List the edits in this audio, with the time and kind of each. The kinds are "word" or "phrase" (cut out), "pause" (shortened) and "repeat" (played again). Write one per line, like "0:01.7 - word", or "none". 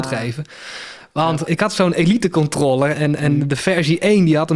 0:01.5 - word
0:02.9 - word